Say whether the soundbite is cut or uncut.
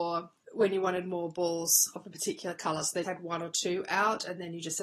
cut